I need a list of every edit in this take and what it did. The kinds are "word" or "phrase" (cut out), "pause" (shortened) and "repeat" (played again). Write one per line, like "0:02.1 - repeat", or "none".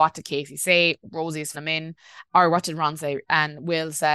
0:01.5 - word